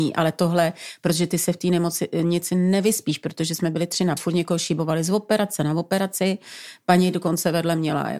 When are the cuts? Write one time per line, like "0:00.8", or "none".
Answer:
0:04.2